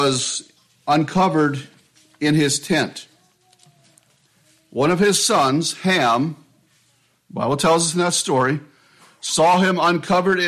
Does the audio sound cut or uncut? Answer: uncut